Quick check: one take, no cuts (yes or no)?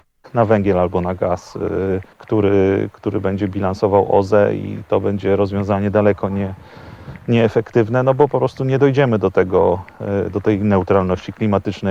no